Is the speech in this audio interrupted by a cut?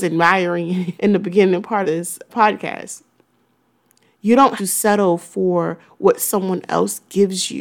yes; 4 cuts; at 1.0 s, 1.8 s, 2.3 s, 4.6 s

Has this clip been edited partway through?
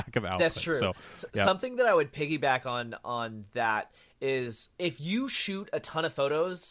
yes; 1 cut; at 4.7 s

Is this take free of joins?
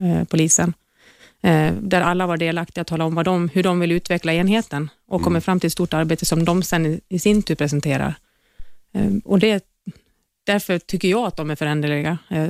yes; 0 cuts

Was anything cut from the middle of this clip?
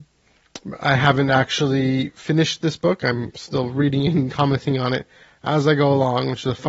no; 0 cuts

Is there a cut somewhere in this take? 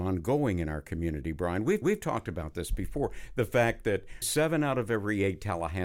yes; 2 cuts; at 1.8 s, 4.2 s

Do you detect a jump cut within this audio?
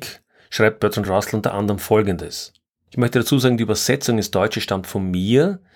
no; 0 cuts

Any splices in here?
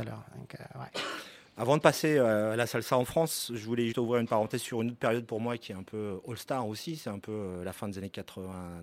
yes; 1 cut; at 3.9 s

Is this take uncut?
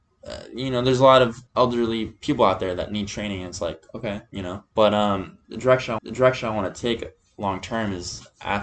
no; 3 cuts; at 1.5 s, 4.7 s, 6.0 s

